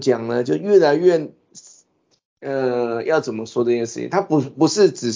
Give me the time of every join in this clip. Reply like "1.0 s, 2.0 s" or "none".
none